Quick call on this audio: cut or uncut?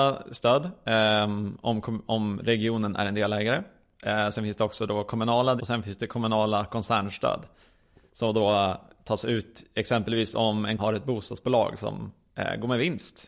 cut